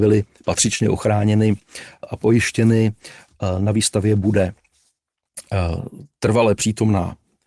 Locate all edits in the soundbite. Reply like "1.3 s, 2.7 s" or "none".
none

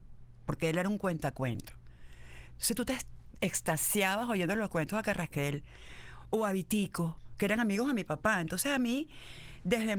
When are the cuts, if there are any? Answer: none

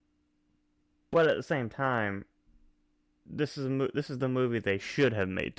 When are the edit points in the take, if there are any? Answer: none

